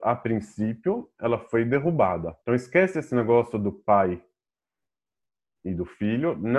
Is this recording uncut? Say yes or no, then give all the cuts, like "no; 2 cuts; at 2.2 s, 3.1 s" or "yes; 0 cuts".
no; 1 cut; at 2.4 s